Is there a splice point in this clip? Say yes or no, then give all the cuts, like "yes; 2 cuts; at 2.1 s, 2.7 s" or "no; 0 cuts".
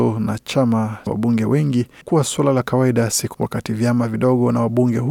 yes; 3 cuts; at 1.1 s, 2.0 s, 3.3 s